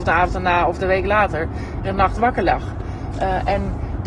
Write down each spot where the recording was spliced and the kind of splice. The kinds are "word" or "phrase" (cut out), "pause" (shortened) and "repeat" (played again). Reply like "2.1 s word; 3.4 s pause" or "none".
1.8 s phrase